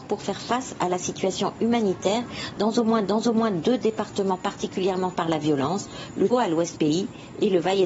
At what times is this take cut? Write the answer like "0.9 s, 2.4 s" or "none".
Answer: 3.0 s, 5.1 s, 6.3 s, 6.7 s